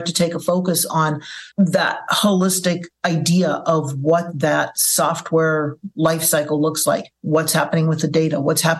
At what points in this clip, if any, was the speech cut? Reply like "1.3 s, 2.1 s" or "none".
1.5 s, 7.1 s

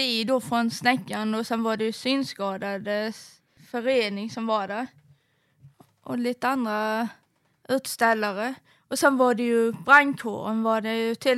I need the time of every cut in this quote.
none

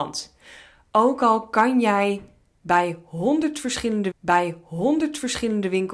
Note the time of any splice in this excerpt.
4.1 s

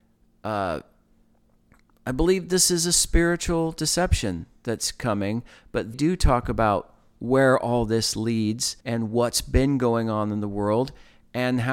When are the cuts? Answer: 5.9 s, 8.8 s

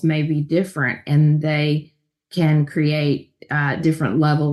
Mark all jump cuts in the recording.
none

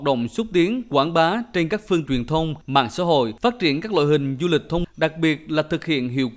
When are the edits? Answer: 2.1 s, 2.6 s, 3.4 s, 4.8 s

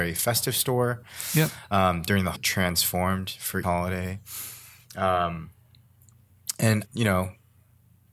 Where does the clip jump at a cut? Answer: 2.3 s, 3.6 s, 6.8 s

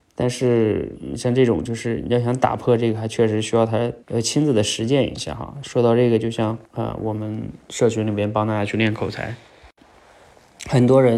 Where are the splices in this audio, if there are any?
4.0 s, 6.6 s

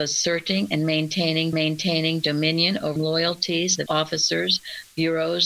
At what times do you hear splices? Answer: 1.5 s, 3.0 s, 3.9 s

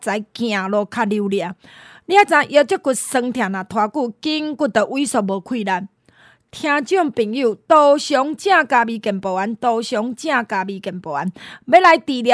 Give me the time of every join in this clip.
none

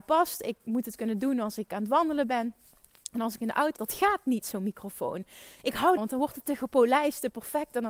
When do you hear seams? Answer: 3.8 s, 4.4 s, 6.0 s

